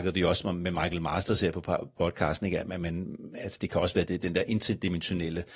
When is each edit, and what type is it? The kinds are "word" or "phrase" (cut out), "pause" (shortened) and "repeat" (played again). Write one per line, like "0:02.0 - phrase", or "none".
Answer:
0:04.1 - word